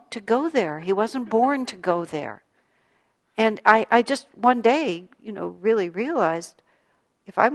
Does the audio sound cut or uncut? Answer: uncut